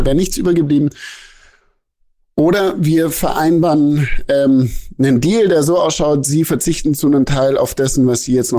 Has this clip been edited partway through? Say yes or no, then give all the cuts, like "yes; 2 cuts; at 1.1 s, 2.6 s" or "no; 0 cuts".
no; 0 cuts